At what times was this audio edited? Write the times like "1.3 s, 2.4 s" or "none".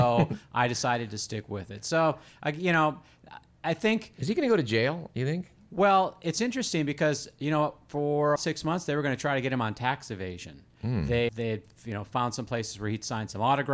8.4 s, 11.3 s